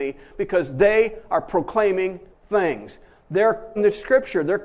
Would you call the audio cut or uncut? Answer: cut